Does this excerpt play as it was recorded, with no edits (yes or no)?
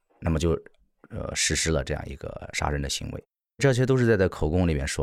yes